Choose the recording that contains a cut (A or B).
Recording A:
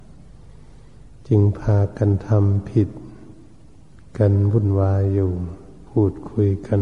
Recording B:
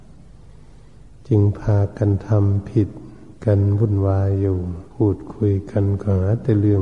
B